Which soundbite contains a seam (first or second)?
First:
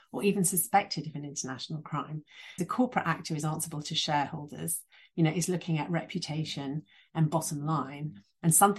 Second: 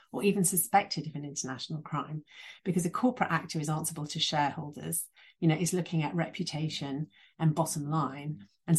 first